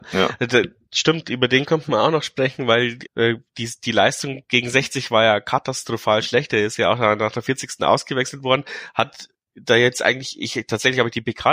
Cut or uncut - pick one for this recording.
cut